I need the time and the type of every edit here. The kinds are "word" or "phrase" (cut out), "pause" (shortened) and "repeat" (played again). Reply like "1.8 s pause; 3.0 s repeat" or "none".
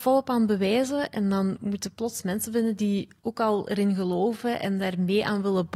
none